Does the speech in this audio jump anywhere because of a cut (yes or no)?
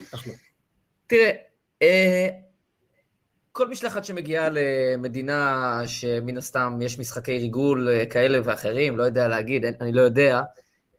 no